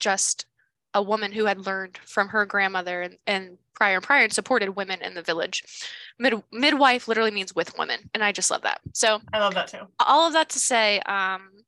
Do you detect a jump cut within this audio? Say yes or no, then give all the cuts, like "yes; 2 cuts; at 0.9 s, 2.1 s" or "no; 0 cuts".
no; 0 cuts